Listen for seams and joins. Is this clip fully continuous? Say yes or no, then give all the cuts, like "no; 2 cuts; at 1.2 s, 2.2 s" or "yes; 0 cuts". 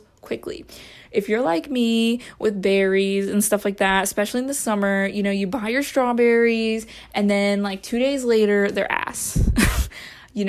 yes; 0 cuts